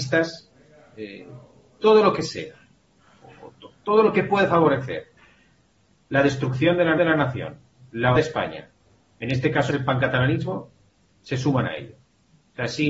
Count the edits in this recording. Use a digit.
3